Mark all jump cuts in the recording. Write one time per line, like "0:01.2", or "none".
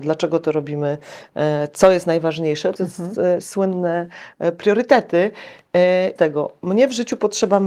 0:02.8
0:06.2